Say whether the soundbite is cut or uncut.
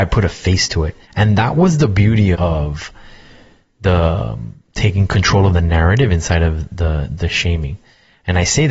cut